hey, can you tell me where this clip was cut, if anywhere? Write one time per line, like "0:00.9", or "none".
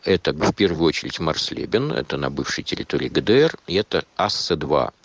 none